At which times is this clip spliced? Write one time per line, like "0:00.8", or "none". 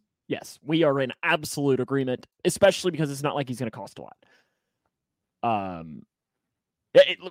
none